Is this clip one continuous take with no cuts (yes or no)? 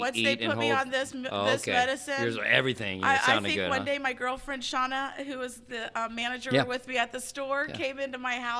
yes